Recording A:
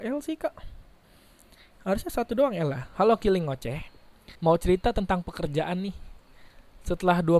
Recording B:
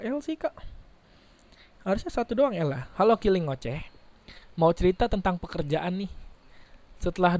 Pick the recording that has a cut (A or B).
A